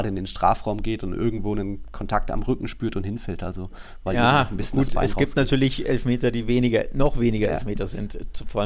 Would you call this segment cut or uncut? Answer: uncut